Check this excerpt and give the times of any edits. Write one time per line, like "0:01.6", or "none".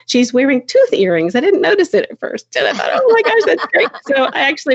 none